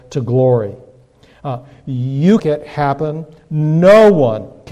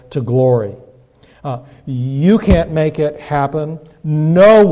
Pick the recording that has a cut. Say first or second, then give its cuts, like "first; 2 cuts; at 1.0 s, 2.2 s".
first; 1 cut; at 2.4 s